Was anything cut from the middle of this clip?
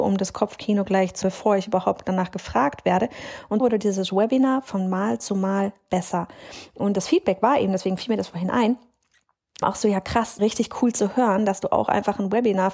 yes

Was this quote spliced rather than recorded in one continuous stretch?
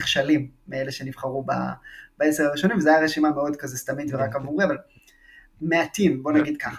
no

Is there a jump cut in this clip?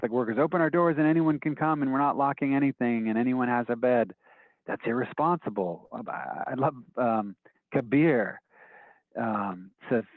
no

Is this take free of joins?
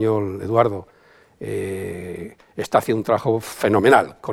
yes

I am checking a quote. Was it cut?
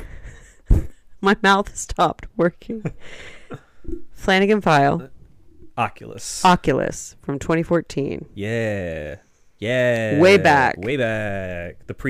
no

